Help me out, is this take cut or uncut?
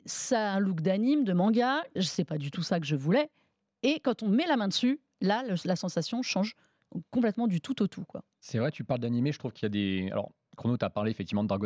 cut